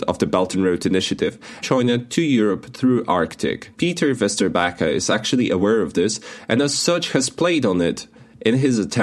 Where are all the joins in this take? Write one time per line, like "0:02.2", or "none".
0:01.6
0:03.7